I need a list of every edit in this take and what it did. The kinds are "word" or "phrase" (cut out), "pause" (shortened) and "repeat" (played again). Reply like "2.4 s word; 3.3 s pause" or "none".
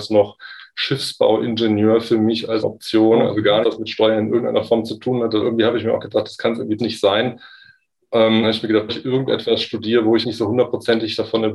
2.6 s word; 3.6 s word; 5.4 s word; 6.8 s word; 8.4 s word; 8.9 s word; 10.2 s word